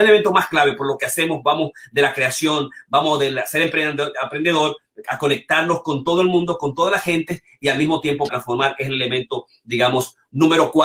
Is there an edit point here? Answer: yes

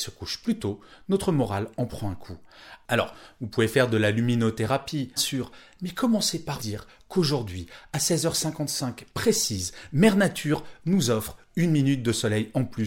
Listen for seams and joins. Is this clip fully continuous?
no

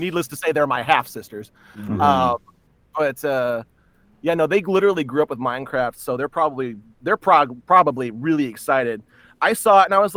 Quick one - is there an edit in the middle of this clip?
no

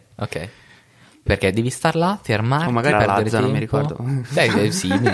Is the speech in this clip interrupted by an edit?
yes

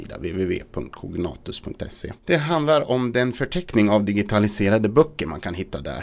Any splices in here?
yes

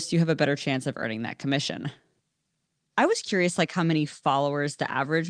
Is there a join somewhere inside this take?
no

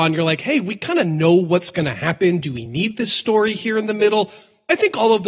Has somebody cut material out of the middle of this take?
no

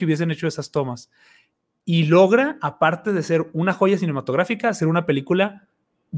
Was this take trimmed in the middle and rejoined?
no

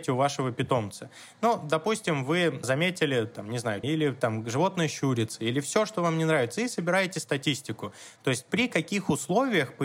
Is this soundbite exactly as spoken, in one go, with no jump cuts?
no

